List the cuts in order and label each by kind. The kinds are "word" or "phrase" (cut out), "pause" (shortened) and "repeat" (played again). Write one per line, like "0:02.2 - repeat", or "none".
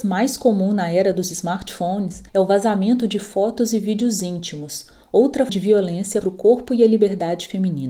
0:02.3 - pause
0:05.5 - word
0:06.2 - word